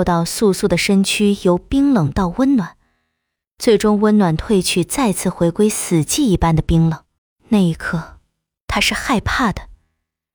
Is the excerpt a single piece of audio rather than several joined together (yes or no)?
no